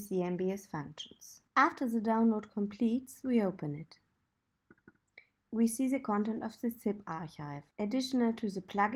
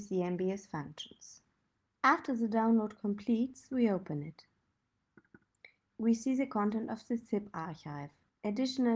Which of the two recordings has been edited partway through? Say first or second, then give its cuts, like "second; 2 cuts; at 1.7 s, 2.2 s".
first; 2 cuts; at 1.5 s, 7.7 s